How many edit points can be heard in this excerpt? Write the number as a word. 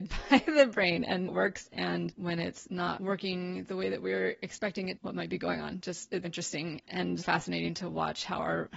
four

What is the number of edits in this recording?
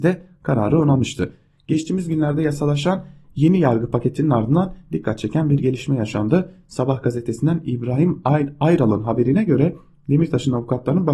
zero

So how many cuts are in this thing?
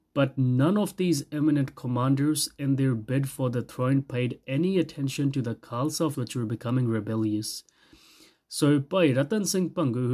one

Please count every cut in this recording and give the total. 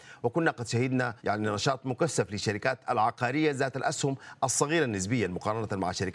one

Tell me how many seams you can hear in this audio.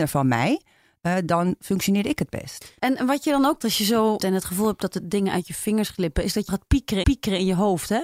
four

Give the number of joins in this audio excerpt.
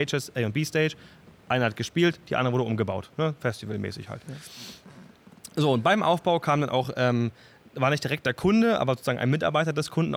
zero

